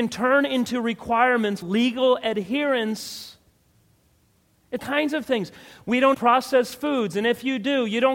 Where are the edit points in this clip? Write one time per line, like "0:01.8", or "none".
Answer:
0:01.6
0:04.8
0:06.1